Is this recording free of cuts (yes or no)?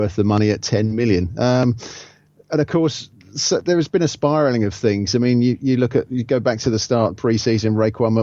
yes